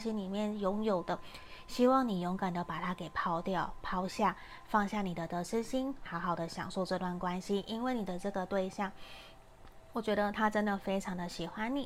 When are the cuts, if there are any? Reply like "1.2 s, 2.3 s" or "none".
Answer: 6.1 s